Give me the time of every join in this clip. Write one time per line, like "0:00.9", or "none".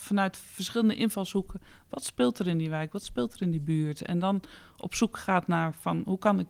none